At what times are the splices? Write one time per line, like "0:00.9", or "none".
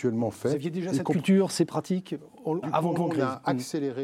0:02.6
0:03.0